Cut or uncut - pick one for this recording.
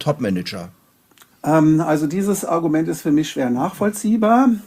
uncut